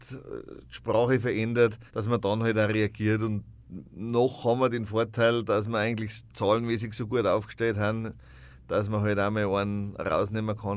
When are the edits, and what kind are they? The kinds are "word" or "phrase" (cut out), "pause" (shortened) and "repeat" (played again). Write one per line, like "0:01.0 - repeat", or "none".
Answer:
0:01.9 - pause